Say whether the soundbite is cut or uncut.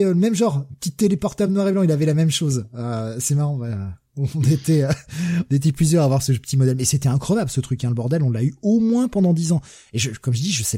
uncut